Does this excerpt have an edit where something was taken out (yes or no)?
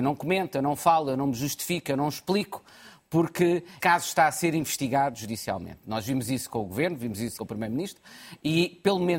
yes